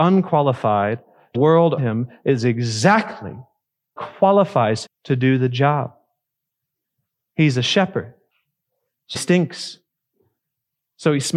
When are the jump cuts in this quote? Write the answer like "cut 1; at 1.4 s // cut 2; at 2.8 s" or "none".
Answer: cut 1; at 1.3 s // cut 2; at 1.8 s // cut 3; at 4.0 s // cut 4; at 4.9 s // cut 5; at 9.1 s